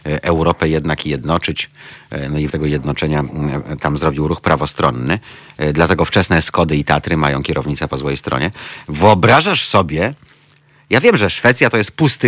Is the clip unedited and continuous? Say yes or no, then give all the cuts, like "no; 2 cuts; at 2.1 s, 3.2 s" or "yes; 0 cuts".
no; 1 cut; at 2.5 s